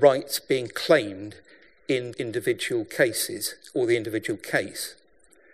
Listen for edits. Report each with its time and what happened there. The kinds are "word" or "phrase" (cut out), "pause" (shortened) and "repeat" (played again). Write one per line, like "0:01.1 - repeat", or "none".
0:02.1 - word